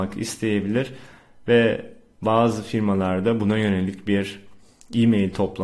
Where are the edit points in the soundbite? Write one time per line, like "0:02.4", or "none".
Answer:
none